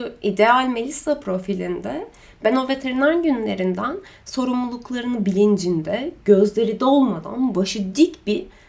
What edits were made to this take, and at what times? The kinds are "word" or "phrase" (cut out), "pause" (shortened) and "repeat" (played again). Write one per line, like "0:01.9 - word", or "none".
none